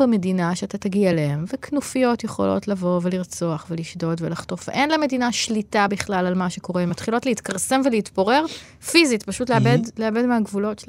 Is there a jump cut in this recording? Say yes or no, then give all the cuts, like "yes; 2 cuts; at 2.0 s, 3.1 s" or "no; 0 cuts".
no; 0 cuts